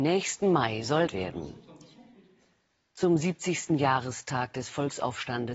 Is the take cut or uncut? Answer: cut